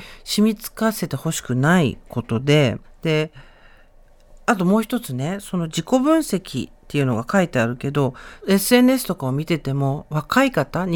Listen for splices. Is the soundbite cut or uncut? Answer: cut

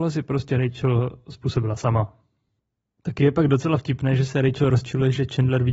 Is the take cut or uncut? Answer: uncut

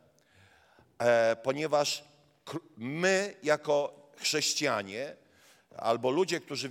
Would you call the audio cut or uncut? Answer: uncut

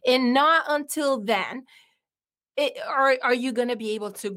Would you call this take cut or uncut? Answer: uncut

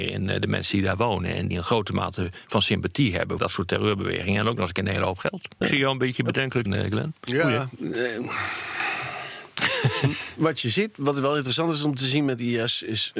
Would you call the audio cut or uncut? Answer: cut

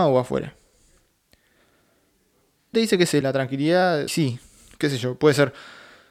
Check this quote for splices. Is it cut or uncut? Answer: cut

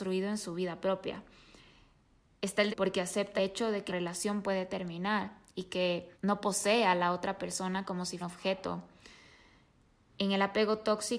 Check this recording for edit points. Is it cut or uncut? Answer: cut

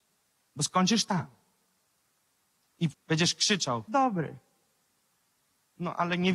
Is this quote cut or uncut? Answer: cut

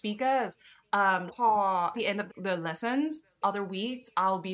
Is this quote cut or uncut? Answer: cut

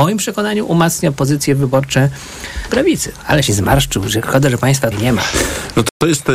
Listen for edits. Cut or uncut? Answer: cut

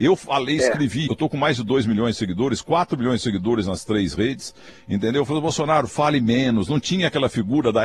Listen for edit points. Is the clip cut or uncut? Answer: cut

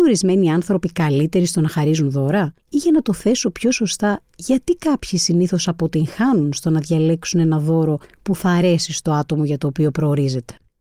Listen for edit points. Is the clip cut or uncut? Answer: cut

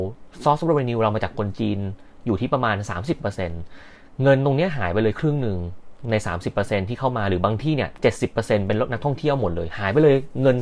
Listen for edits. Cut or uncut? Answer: uncut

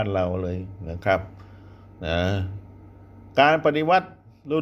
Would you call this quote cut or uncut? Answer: uncut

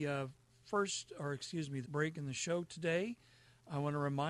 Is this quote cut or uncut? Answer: cut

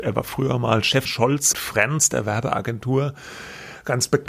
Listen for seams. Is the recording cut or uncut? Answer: cut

